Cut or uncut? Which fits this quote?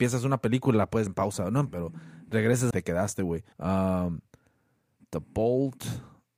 cut